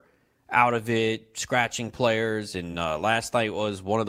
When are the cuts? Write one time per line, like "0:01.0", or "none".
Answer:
none